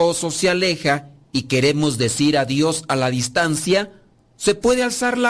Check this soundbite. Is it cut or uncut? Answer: uncut